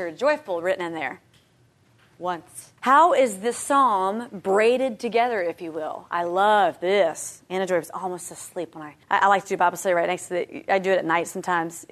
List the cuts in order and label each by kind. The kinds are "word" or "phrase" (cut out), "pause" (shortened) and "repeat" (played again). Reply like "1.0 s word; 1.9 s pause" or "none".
2.8 s pause; 9.0 s pause